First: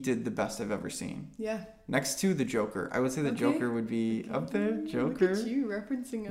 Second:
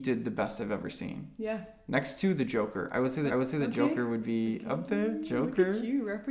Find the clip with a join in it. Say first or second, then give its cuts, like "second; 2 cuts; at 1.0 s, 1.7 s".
second; 1 cut; at 3.3 s